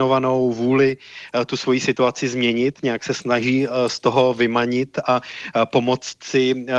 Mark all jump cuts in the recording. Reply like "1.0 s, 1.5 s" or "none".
none